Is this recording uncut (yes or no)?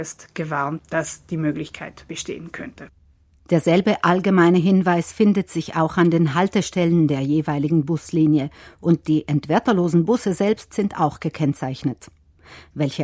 yes